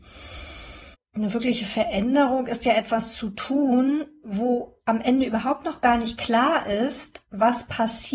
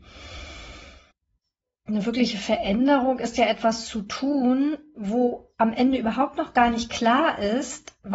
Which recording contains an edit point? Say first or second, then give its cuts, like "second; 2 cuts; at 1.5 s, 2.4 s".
first; 1 cut; at 0.9 s